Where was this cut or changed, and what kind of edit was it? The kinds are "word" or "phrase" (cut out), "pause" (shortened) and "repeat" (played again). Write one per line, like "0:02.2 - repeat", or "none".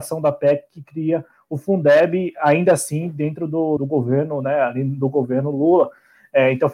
0:03.8 - word